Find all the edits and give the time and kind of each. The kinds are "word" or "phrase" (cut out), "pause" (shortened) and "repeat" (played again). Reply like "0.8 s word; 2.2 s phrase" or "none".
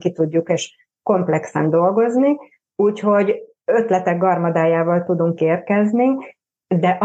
none